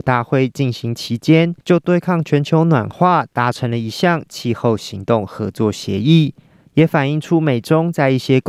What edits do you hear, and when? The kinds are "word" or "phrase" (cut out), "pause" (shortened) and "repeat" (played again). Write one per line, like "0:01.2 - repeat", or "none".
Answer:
0:01.6 - pause